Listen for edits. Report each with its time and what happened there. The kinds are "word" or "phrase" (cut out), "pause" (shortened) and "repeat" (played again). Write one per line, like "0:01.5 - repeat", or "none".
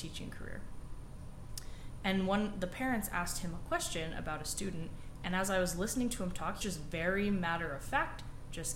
0:06.6 - phrase